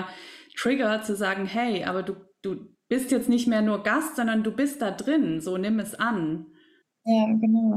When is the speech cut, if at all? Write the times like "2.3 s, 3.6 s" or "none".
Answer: none